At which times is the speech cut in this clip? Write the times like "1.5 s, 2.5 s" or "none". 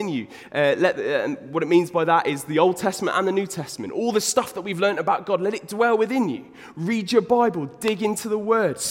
none